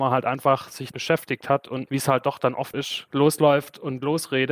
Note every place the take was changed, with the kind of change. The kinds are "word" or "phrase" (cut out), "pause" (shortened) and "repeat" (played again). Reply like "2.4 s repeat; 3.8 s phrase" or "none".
0.9 s word; 1.9 s word; 2.7 s word